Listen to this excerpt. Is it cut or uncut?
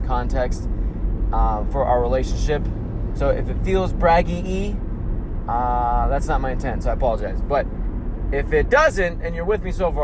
uncut